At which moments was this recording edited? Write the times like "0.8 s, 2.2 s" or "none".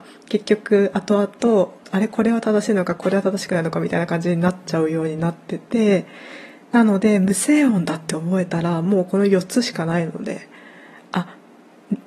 none

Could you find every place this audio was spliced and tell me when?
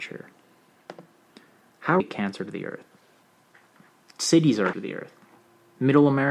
2.0 s, 4.7 s

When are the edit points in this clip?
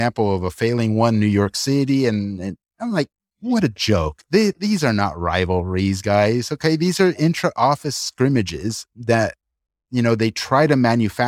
none

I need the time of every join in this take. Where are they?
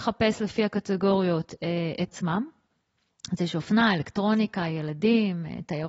2.1 s

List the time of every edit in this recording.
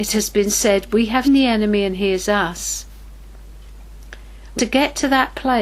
1.2 s, 4.6 s

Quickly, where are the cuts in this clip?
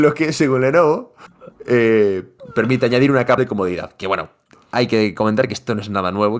3.4 s

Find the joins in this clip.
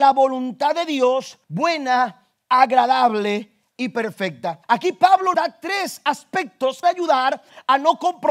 1.4 s, 4.6 s, 5.3 s, 6.8 s

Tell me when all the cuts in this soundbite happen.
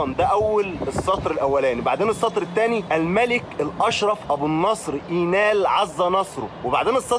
none

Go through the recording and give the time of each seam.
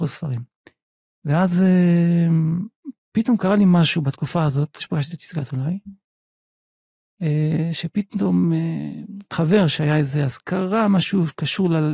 4.8 s, 9.3 s

